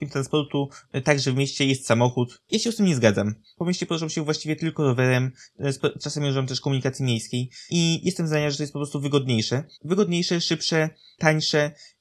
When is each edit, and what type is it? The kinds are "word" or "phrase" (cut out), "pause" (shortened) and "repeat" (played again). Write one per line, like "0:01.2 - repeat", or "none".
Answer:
0:09.7 - pause